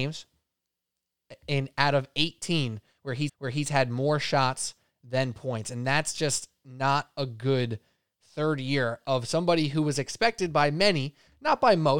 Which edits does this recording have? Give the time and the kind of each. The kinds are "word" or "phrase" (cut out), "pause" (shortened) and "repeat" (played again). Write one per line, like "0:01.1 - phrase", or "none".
0:03.3 - repeat